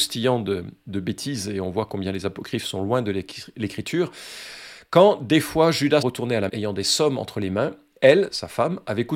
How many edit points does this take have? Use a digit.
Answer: 2